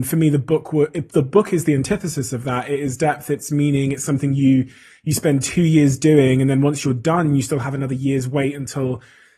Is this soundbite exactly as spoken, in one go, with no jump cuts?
yes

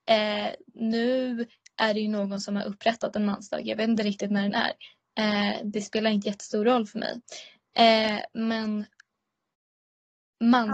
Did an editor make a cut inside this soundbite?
no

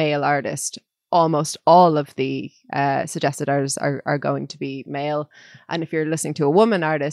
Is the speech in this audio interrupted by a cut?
no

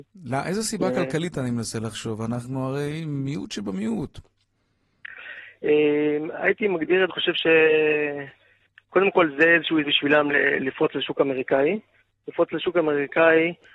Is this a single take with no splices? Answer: no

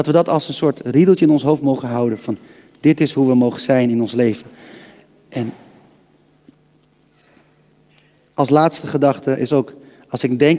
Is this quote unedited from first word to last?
yes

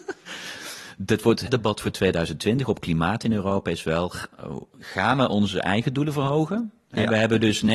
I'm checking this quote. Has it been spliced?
yes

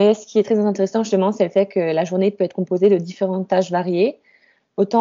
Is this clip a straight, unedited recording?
yes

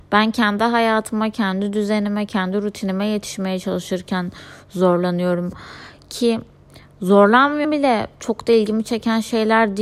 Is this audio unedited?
no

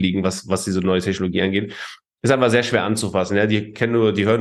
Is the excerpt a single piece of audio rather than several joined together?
yes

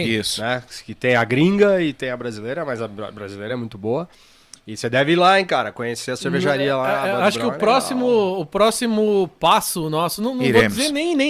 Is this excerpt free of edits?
yes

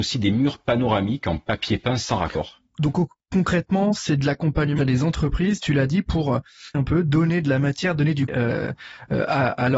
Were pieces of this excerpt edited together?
yes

